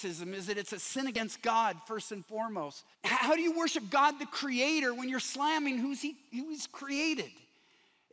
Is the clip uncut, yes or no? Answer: no